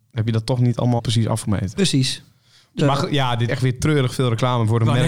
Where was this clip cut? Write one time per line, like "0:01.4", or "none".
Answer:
0:01.0
0:02.8
0:03.5